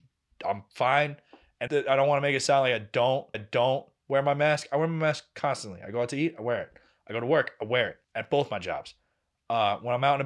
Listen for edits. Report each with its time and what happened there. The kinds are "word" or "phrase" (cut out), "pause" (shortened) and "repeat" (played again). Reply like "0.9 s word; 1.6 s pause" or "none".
1.7 s word; 3.3 s repeat; 8.0 s pause